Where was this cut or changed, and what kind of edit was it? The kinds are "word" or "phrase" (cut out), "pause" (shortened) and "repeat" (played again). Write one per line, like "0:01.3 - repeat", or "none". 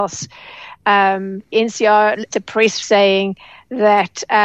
0:01.5 - word
0:02.3 - word
0:02.8 - word

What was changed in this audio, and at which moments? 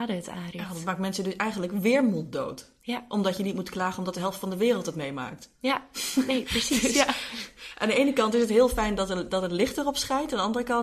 none

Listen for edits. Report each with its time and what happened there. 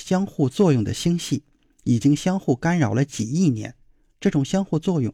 none

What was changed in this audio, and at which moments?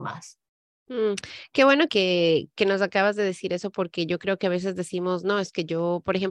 0:01.9 - word

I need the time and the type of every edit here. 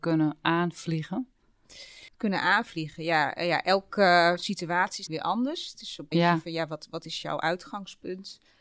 0:02.1 - pause
0:05.1 - phrase
0:06.1 - word

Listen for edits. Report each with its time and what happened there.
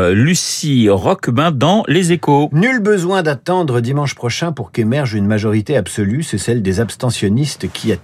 none

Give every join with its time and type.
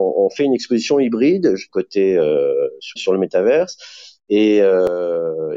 0:01.7 - phrase
0:03.0 - word

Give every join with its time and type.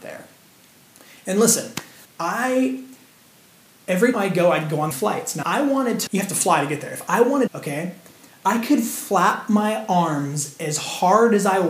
0:02.0 - word
0:04.1 - word
0:04.9 - phrase
0:05.4 - phrase
0:06.1 - word
0:07.5 - phrase

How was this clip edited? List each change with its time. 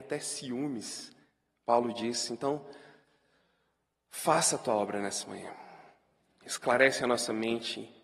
none

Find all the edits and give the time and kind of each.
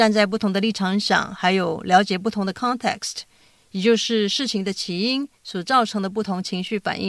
0:05.4 - pause

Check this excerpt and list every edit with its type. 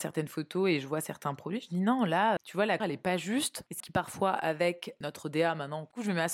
0:02.4 - word
0:02.8 - word
0:03.8 - word

